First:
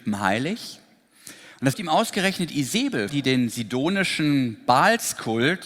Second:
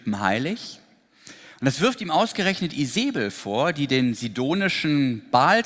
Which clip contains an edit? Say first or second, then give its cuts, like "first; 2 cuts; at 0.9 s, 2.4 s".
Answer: first; 2 cuts; at 1.7 s, 3.1 s